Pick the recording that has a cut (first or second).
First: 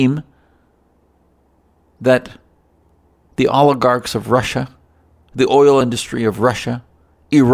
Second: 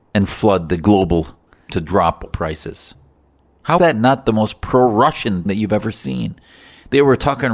second